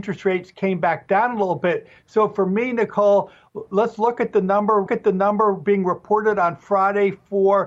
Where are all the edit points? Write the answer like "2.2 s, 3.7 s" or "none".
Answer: 4.9 s